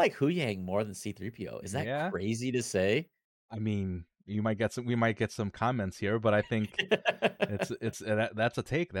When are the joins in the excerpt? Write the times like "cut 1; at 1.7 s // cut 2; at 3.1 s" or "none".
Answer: none